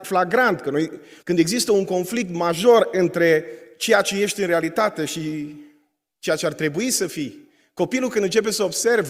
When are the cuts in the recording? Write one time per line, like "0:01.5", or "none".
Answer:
0:01.2